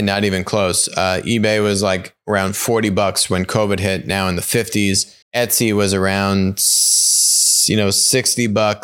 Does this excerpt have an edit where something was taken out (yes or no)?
yes